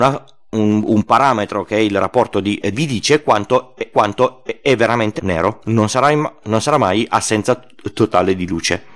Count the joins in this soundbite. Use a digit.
3